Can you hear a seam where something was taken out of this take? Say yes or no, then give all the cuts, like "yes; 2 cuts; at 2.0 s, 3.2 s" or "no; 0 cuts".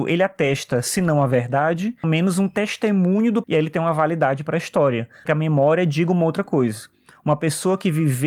yes; 3 cuts; at 2.0 s, 3.4 s, 5.3 s